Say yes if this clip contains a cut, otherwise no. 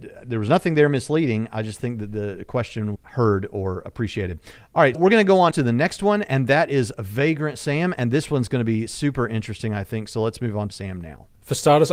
yes